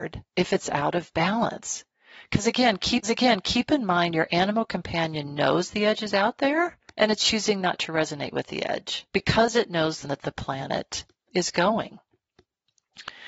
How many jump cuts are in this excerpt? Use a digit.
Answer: 5